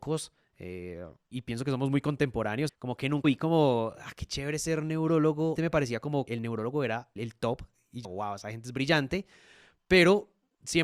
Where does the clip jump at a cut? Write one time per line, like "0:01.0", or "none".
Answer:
0:01.3
0:02.7
0:03.2
0:05.6
0:06.3
0:07.2
0:08.0